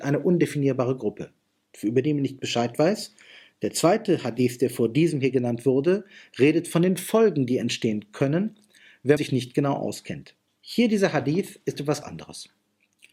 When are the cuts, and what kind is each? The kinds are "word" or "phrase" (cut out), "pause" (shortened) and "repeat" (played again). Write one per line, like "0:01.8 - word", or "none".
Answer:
0:09.2 - word
0:10.5 - pause
0:12.0 - word